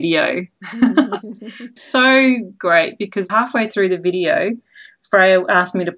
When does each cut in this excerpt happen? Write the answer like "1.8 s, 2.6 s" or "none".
1.8 s, 3.3 s